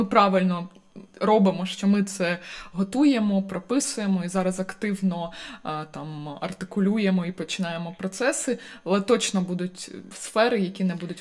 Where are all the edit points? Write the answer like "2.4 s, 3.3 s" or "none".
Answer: none